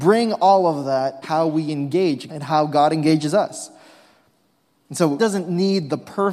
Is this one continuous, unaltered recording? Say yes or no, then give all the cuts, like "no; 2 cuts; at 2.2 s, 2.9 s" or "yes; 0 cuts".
no; 3 cuts; at 1.2 s, 2.3 s, 5.2 s